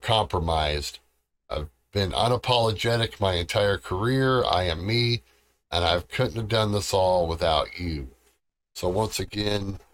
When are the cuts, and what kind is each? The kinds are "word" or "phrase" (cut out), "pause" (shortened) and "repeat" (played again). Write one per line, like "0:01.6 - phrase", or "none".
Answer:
none